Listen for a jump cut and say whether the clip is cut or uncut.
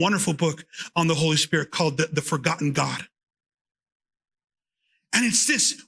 uncut